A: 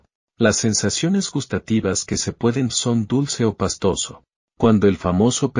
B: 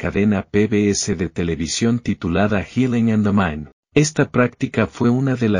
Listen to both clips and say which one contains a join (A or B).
A